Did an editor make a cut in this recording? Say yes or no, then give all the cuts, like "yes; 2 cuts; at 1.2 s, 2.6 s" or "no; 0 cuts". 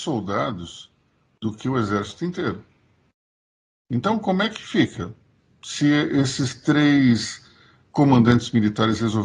no; 0 cuts